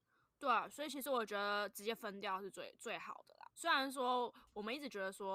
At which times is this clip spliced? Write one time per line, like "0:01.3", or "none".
0:03.5